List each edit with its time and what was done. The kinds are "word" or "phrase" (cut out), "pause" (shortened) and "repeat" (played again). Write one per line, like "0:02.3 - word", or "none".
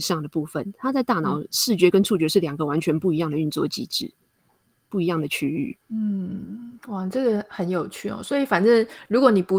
0:05.8 - pause